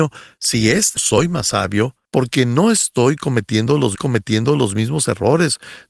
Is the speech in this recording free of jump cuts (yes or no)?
no